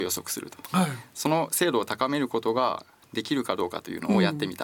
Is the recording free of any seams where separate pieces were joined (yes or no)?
yes